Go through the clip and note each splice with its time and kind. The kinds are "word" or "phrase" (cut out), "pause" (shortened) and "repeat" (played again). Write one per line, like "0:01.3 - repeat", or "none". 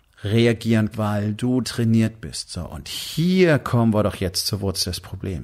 0:00.9 - word
0:01.6 - word